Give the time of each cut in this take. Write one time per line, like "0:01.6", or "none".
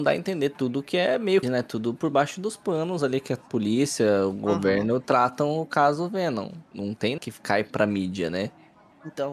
0:01.4
0:07.2